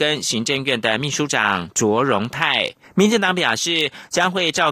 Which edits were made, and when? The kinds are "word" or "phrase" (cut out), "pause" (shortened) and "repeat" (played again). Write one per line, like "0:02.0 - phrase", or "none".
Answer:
0:02.8 - pause